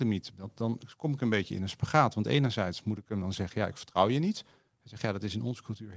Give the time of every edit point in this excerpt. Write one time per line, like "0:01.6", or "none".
none